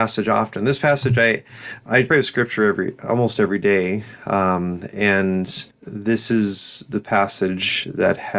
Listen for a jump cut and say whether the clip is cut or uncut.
cut